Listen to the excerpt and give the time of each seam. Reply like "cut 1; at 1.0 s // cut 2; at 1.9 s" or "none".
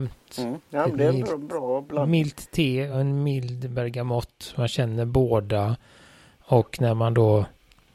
none

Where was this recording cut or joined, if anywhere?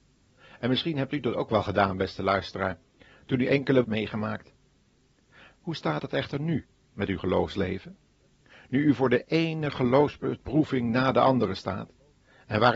cut 1; at 3.8 s

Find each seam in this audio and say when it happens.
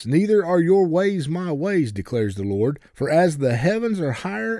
cut 1; at 2.9 s

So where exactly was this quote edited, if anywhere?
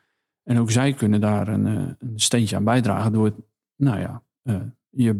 none

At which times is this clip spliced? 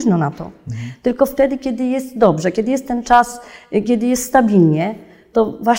none

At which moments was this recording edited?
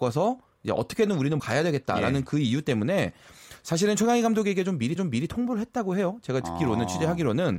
cut 1; at 1.4 s // cut 2; at 5.0 s

